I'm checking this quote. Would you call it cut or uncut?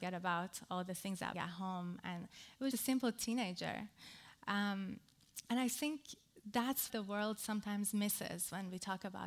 cut